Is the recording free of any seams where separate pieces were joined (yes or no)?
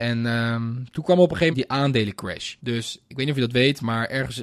no